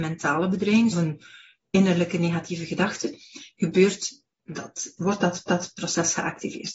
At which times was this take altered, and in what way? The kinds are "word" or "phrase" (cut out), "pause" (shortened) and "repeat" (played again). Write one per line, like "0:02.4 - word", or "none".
0:00.9 - phrase
0:05.0 - word
0:05.5 - repeat